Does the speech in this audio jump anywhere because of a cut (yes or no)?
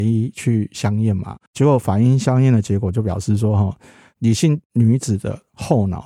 yes